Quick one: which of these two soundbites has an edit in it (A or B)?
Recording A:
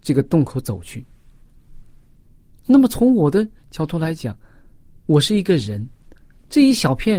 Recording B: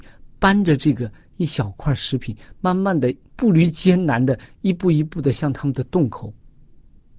B